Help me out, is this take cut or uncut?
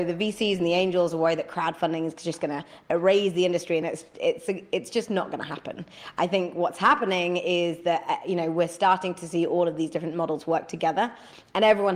uncut